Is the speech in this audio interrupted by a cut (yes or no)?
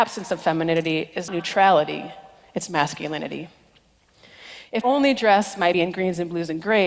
yes